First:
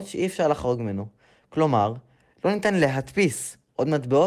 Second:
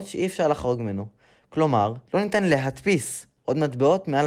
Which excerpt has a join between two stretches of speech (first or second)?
second